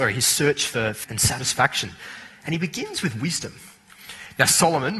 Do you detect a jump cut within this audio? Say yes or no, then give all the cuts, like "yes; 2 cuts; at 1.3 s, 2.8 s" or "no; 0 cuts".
yes; 1 cut; at 1.0 s